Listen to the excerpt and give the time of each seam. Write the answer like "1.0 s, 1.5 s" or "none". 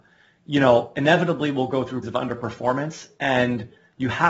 2.0 s